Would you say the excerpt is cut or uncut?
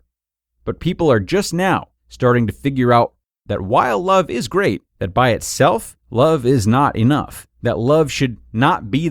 cut